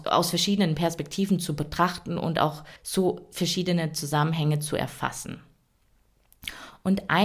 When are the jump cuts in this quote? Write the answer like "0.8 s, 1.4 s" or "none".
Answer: 2.8 s